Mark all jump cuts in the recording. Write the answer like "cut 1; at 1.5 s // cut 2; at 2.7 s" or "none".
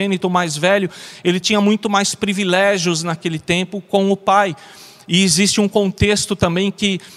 none